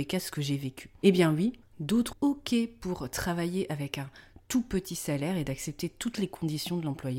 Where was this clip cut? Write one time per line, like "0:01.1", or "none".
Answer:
0:02.1